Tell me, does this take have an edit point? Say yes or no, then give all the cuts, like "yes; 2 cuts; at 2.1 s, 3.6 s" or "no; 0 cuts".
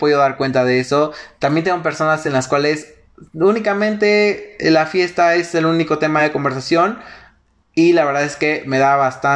no; 0 cuts